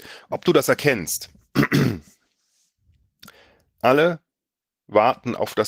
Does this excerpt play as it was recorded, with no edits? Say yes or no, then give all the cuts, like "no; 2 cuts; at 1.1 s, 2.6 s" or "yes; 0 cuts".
yes; 0 cuts